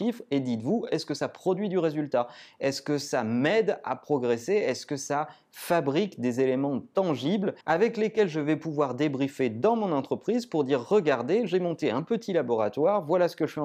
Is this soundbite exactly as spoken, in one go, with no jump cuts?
no; 1 cut; at 7.6 s

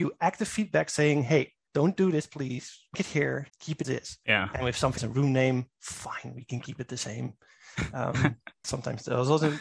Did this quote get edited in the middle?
yes; 5 cuts; at 2.9 s, 3.5 s, 3.8 s, 5.0 s, 8.6 s

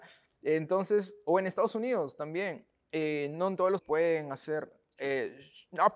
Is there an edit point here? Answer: yes; 1 cut; at 3.8 s

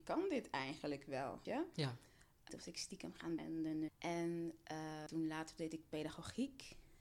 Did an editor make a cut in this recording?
yes; 5 cuts; at 1.4 s, 2.5 s, 3.4 s, 3.9 s, 5.1 s

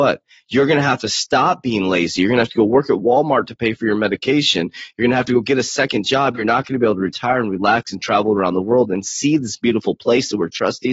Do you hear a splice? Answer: no; 0 cuts

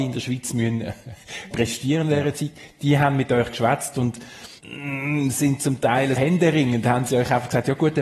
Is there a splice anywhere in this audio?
yes; 3 cuts; at 1.5 s, 4.6 s, 6.2 s

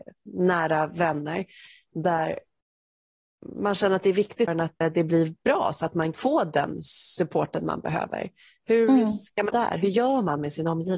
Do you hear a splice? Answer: yes; 4 cuts; at 4.5 s, 4.8 s, 6.1 s, 9.5 s

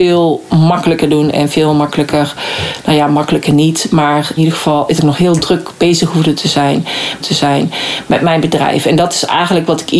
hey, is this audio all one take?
no; 3 cuts; at 4.4 s, 5.0 s, 7.2 s

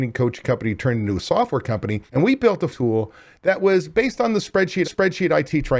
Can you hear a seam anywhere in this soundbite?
yes; 3 cuts; at 2.1 s, 2.7 s, 4.8 s

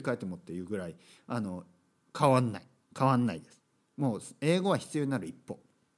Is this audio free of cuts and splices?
yes; 0 cuts

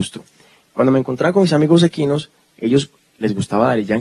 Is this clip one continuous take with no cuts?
yes; 0 cuts

